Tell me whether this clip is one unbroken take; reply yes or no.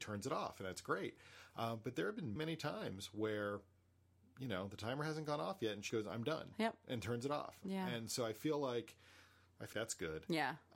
no